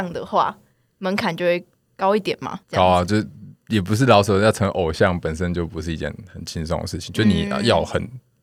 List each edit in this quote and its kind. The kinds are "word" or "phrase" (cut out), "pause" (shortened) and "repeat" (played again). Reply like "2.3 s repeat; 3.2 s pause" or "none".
2.6 s pause